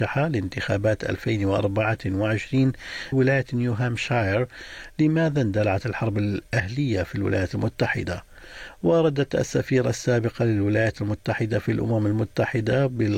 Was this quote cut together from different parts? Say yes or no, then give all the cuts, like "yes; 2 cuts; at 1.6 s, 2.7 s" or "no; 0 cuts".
yes; 1 cut; at 3.1 s